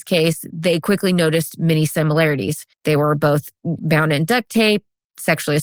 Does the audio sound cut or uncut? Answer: cut